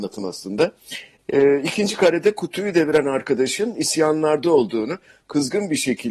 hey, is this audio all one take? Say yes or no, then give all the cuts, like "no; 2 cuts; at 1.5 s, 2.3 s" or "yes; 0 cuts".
yes; 0 cuts